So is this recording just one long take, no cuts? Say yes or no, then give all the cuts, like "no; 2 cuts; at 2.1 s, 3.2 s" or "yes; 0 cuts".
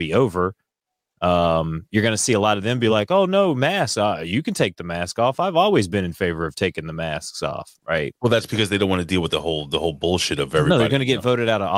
yes; 0 cuts